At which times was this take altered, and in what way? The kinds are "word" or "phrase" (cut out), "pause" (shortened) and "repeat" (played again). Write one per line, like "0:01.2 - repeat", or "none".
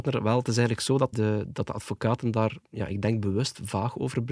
0:01.1 - word
0:02.6 - pause